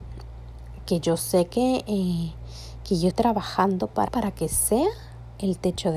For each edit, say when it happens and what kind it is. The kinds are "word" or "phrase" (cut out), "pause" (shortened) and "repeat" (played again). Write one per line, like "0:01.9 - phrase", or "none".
0:03.1 - word
0:04.1 - word